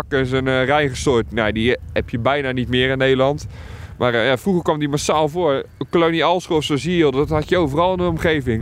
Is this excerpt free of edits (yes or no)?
yes